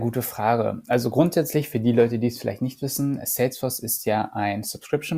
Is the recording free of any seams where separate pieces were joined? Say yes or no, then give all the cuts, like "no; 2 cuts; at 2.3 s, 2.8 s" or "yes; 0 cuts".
yes; 0 cuts